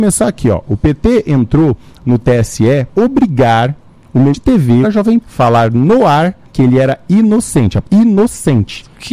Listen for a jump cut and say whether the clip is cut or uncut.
cut